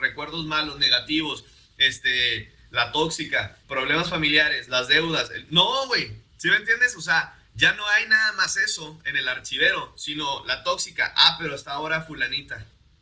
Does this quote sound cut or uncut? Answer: cut